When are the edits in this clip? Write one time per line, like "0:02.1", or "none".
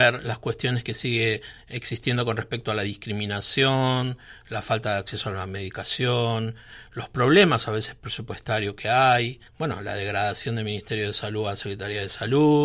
0:09.5